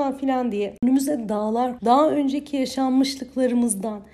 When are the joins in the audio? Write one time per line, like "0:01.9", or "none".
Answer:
0:01.8